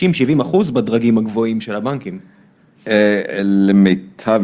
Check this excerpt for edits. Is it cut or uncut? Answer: uncut